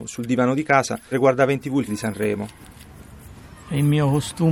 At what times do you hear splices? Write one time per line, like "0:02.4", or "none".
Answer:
0:01.1
0:01.9